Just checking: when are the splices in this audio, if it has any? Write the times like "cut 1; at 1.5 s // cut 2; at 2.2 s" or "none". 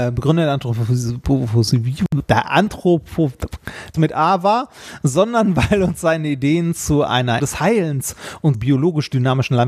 cut 1; at 3.9 s // cut 2; at 7.4 s // cut 3; at 8.5 s